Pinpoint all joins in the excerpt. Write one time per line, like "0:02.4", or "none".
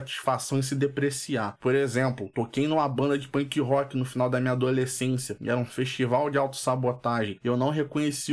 0:02.3